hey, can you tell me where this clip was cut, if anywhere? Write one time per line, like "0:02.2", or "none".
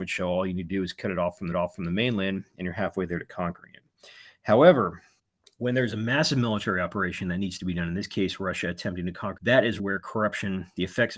0:01.5
0:05.2
0:09.4
0:09.8